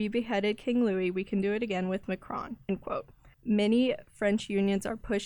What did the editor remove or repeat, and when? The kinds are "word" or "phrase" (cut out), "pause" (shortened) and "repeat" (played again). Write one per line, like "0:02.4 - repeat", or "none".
0:02.6 - pause
0:03.3 - pause